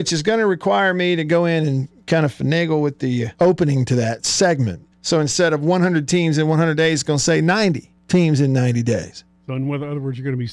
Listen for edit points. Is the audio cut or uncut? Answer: cut